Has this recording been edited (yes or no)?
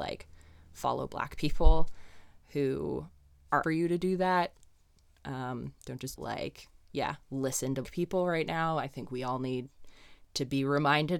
yes